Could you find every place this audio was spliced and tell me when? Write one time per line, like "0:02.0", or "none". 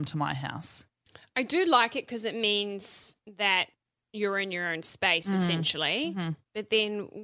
none

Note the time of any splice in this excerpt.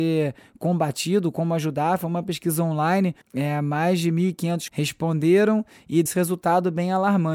0:03.2
0:04.7
0:06.1

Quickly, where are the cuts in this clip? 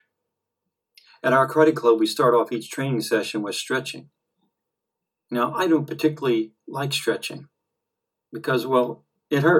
none

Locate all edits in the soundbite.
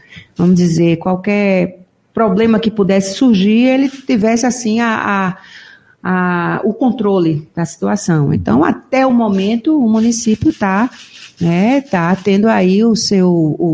none

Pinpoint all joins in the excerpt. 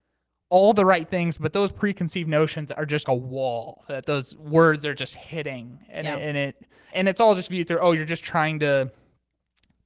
0:03.0
0:06.9

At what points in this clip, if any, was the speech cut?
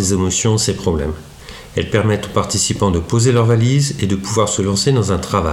none

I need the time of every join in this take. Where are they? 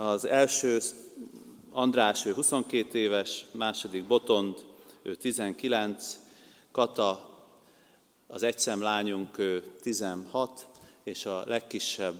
none

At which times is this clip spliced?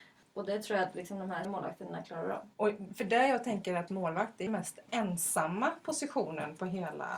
0:01.4
0:02.5
0:03.9
0:04.5

